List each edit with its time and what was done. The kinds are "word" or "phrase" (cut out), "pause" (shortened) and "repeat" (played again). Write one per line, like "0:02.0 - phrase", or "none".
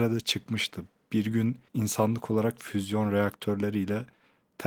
0:01.7 - pause